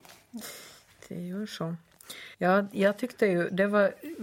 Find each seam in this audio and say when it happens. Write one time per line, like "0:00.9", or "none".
0:02.3